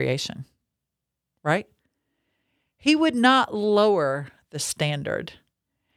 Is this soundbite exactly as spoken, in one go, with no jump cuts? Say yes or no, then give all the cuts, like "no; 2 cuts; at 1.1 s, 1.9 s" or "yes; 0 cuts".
yes; 0 cuts